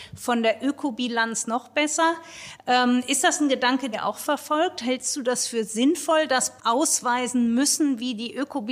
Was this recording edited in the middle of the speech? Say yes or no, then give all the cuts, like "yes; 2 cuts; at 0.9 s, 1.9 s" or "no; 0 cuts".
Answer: yes; 2 cuts; at 3.9 s, 6.6 s